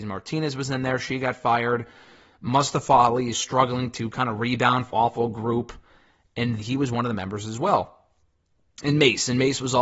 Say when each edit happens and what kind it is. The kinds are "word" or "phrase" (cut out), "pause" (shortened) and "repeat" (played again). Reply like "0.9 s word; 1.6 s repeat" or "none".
3.3 s word; 4.9 s word; 6.6 s word